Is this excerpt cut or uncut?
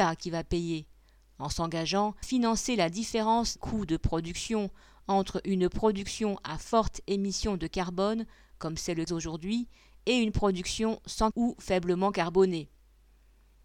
cut